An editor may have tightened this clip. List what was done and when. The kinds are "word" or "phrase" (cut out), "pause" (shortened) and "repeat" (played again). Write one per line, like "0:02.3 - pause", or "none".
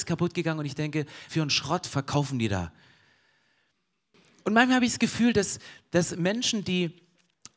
0:01.3 - word